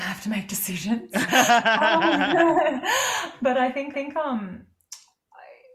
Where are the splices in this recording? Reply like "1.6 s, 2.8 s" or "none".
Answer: 3.9 s